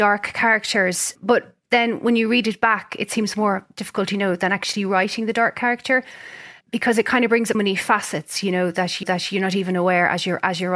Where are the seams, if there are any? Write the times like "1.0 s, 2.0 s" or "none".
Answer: 6.6 s, 7.5 s, 9.0 s